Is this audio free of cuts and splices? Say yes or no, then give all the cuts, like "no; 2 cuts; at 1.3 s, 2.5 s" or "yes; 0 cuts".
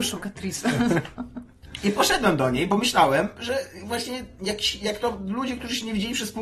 yes; 0 cuts